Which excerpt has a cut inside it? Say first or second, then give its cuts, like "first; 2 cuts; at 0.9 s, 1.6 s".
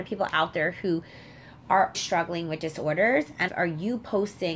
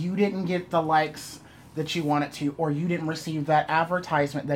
first; 2 cuts; at 1.9 s, 3.5 s